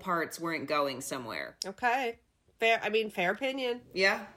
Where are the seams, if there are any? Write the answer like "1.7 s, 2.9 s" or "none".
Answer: none